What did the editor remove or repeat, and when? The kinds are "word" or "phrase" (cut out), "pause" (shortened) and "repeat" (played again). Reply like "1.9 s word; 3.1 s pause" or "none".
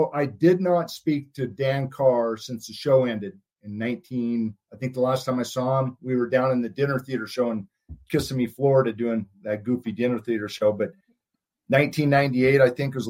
none